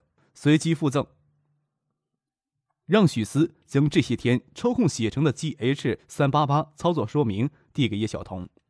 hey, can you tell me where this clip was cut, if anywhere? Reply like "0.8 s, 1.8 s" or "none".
none